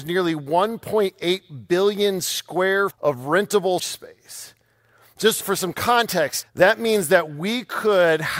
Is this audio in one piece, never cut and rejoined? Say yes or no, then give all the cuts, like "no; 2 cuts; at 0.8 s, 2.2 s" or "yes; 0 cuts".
no; 4 cuts; at 2.9 s, 3.8 s, 5.4 s, 6.4 s